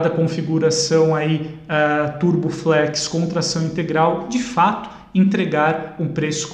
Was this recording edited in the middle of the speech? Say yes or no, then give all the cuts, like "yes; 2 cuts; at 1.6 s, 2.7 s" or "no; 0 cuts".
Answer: no; 0 cuts